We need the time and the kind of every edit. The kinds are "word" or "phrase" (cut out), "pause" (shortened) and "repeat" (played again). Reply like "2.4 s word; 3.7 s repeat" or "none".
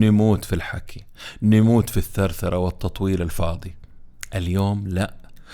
none